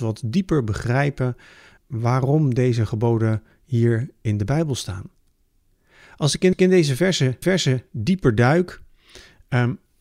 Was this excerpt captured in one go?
no; 3 cuts; at 1.8 s, 6.5 s, 7.4 s

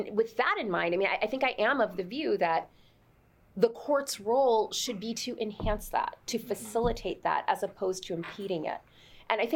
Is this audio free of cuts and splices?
yes; 0 cuts

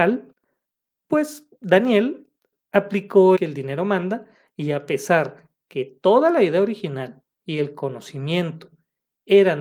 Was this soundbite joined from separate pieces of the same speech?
yes; 1 cut; at 3.4 s

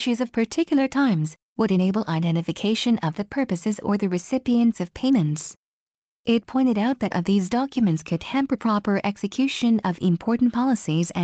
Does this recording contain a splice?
yes; 1 cut; at 7.1 s

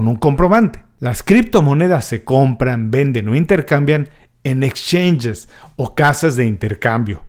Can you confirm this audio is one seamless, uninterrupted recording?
yes; 0 cuts

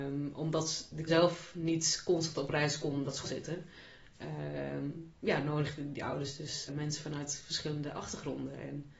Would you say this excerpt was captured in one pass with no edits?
no; 3 cuts; at 1.1 s, 3.2 s, 6.7 s

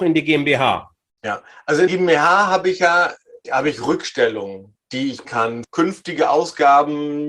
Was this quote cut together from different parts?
yes; 4 cuts; at 1.9 s, 3.4 s, 5.2 s, 5.6 s

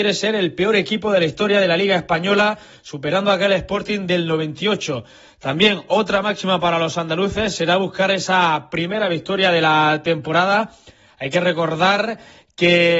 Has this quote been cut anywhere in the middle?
no; 0 cuts

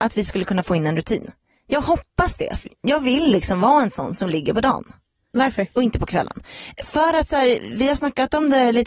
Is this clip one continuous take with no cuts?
yes; 0 cuts

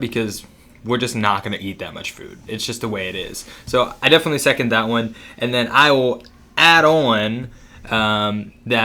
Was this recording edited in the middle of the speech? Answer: no; 0 cuts

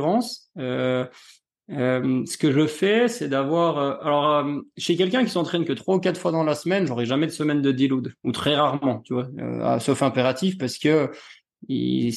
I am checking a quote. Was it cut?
no; 0 cuts

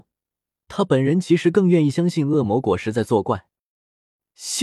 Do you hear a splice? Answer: no; 0 cuts

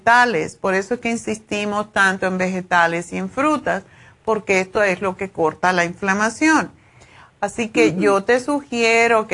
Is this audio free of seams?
yes; 0 cuts

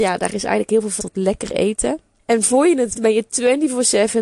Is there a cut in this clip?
yes; 3 cuts; at 1.0 s, 2.2 s, 2.9 s

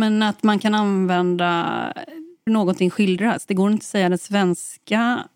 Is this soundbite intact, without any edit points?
no; 1 cut; at 2.5 s

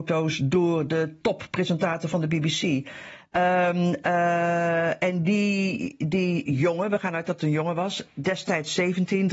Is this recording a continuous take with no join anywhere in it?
yes; 0 cuts

